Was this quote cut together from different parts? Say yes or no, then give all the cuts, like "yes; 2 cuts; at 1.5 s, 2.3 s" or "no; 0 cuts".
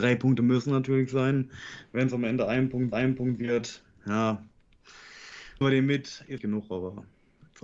yes; 3 cuts; at 2.9 s, 5.6 s, 6.4 s